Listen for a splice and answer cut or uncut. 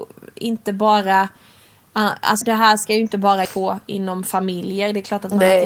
cut